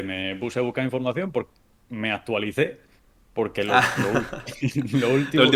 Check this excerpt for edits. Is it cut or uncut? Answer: uncut